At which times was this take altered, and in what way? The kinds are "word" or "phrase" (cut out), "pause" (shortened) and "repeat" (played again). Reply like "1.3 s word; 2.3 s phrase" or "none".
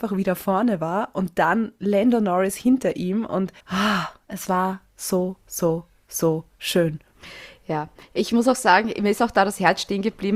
3.6 s pause; 5.4 s pause